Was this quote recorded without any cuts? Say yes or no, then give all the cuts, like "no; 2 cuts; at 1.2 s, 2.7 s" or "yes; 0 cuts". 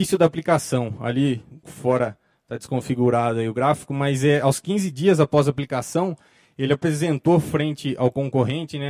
no; 1 cut; at 1.6 s